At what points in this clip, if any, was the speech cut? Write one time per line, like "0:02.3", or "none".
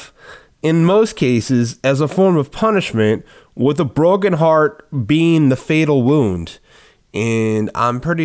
none